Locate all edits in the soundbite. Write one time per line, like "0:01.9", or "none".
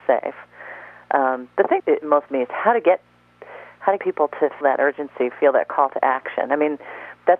0:01.8
0:02.3
0:04.0
0:04.6